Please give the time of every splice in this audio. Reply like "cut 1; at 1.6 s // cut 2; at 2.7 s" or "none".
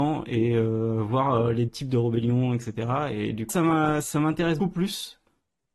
cut 1; at 1.7 s // cut 2; at 3.5 s // cut 3; at 4.6 s